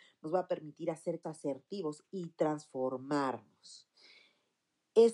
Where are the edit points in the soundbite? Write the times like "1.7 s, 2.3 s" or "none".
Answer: 1.2 s